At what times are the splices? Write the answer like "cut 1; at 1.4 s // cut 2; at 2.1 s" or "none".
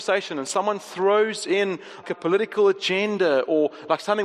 cut 1; at 2.0 s